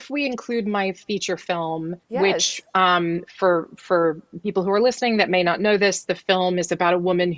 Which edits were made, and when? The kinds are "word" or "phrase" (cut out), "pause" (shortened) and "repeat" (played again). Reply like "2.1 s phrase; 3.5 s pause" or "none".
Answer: 2.0 s pause